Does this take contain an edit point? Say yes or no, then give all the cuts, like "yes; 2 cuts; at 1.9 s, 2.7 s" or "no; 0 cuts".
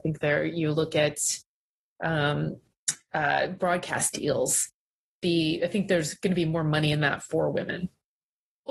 no; 0 cuts